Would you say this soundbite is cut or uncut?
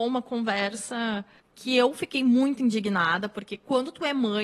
cut